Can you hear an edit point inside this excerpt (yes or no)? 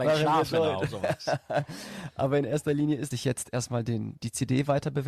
yes